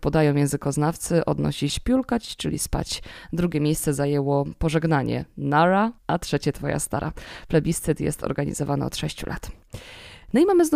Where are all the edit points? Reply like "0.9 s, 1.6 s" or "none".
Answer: 1.7 s, 6.0 s